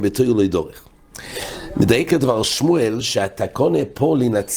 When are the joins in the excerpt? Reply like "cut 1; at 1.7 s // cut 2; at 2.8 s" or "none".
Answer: none